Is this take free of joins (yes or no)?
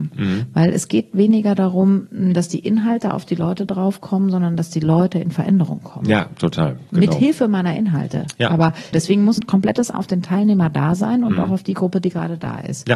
no